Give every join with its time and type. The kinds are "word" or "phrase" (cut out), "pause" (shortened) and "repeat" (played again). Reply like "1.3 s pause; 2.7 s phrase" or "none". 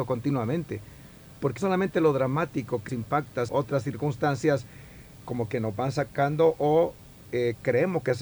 1.6 s word; 2.9 s word; 3.5 s word; 5.2 s word